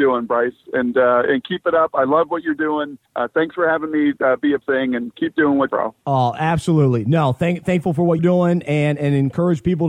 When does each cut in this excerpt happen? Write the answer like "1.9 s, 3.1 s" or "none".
3.0 s, 4.6 s, 5.7 s, 8.2 s